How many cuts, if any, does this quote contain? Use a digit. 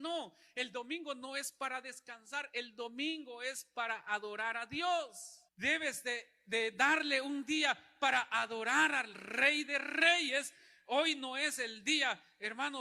1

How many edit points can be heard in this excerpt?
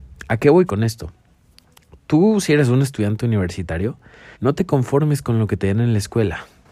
1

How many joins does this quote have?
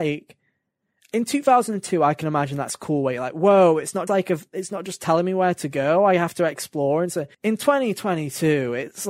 2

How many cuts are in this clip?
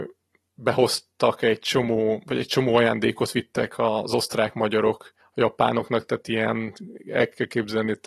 1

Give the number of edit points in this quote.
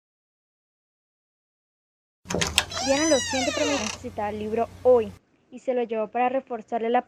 1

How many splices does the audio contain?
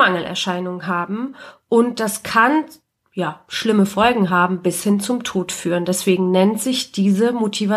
0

